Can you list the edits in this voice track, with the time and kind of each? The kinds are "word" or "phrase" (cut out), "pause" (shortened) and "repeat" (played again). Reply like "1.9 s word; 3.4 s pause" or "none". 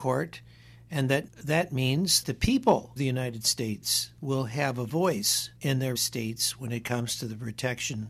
1.3 s word; 2.2 s word; 3.0 s word; 4.2 s pause; 5.6 s pause; 6.0 s word